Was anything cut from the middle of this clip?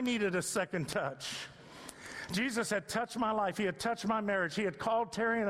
no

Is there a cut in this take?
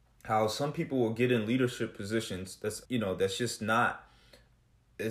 yes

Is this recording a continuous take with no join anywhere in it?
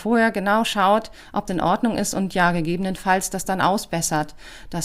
no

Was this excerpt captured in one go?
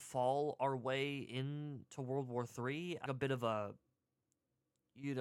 no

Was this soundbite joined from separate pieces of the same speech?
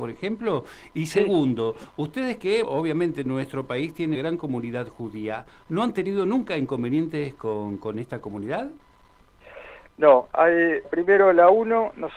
yes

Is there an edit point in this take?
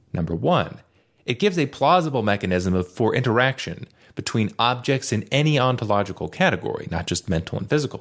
no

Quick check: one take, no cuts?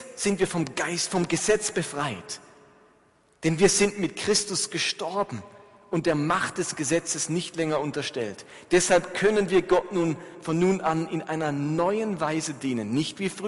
yes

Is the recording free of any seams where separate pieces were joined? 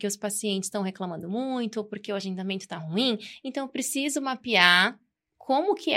yes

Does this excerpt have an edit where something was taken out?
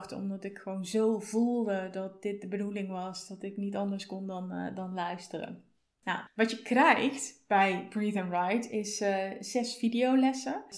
no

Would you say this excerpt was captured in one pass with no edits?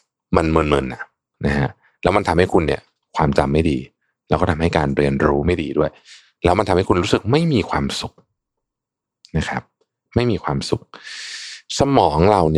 yes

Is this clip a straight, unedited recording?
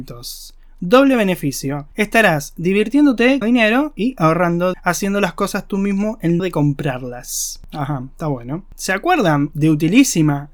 no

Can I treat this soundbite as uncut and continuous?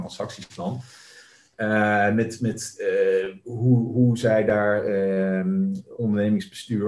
yes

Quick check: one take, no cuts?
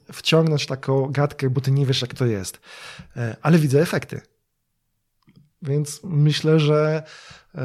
yes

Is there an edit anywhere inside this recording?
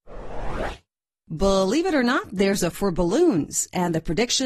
yes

